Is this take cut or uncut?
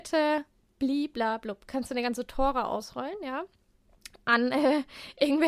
uncut